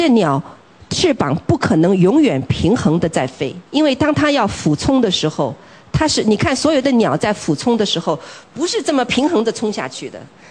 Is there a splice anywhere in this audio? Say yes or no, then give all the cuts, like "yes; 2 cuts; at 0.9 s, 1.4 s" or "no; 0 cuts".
yes; 1 cut; at 3.7 s